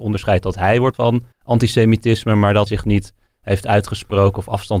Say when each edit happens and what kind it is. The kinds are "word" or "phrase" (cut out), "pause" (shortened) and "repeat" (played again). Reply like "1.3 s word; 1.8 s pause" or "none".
0.9 s word; 1.3 s pause; 2.7 s word

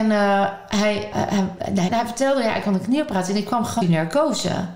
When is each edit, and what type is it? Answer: 1.1 s word; 1.9 s phrase; 3.8 s phrase

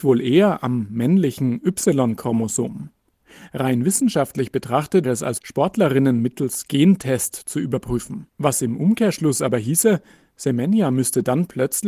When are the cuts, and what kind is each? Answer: 5.0 s word; 5.4 s word; 8.3 s pause

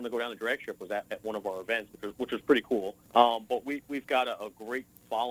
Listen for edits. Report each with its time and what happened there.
3.0 s pause

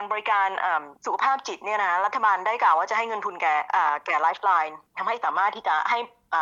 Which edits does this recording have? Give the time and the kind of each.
0.9 s pause

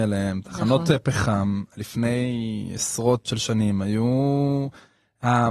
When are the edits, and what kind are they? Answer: 3.2 s word

